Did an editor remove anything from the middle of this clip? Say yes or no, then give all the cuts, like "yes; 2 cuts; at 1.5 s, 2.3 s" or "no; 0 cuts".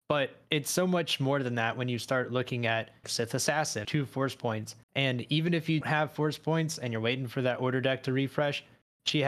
yes; 4 cuts; at 3.0 s, 3.8 s, 4.8 s, 5.8 s